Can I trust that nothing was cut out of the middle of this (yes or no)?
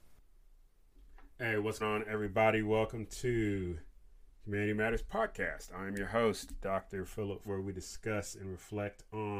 no